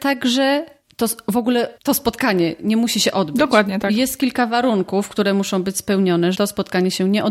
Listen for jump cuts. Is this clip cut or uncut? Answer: cut